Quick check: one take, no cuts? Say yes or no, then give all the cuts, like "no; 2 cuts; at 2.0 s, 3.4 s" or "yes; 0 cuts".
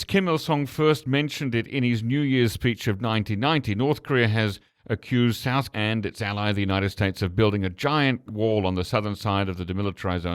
no; 2 cuts; at 5.7 s, 8.3 s